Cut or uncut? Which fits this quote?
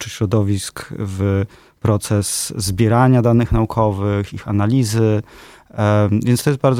uncut